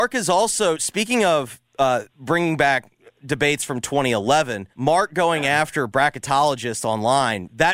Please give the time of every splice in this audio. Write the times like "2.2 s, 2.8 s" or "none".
2.1 s, 4.7 s